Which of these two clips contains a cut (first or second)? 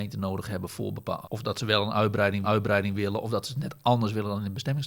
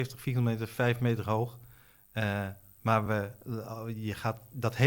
first